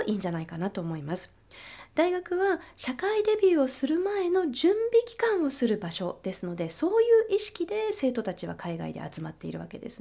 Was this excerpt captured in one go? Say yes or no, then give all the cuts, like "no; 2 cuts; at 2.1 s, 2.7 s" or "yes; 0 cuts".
yes; 0 cuts